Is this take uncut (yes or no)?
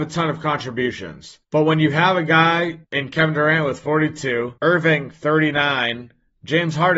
no